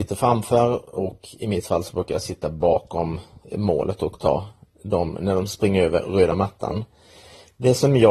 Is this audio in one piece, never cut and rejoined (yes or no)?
yes